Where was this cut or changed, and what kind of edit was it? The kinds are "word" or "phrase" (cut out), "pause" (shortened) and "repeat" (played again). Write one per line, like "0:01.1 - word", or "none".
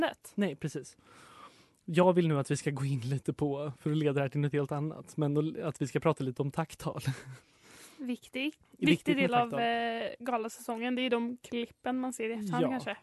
none